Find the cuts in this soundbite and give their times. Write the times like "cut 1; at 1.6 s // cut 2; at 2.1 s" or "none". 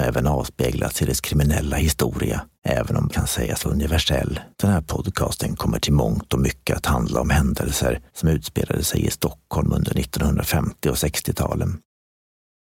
cut 1; at 2.6 s // cut 2; at 3.1 s // cut 3; at 3.6 s // cut 4; at 4.5 s // cut 5; at 8.1 s